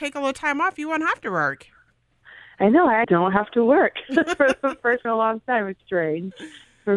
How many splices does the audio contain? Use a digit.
3